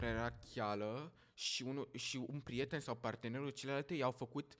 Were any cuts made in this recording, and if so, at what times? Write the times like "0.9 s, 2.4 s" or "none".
none